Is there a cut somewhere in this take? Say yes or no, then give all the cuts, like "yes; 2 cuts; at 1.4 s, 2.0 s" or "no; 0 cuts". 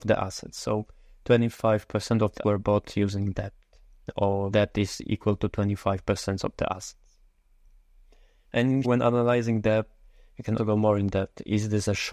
yes; 4 cuts; at 2.4 s, 4.5 s, 8.8 s, 10.6 s